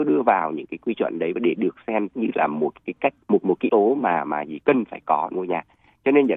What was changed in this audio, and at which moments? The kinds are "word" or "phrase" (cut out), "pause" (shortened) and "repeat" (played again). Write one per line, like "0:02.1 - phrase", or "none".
0:02.1 - word
0:03.2 - pause
0:03.7 - word
0:05.3 - phrase